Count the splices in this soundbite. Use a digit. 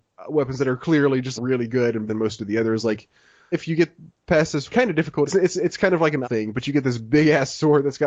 6